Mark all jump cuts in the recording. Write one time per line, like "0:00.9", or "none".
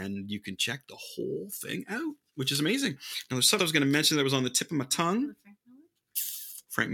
0:03.6